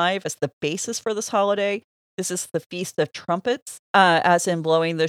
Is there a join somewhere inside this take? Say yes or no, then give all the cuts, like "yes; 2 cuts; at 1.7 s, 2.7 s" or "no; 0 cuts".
yes; 1 cut; at 3.8 s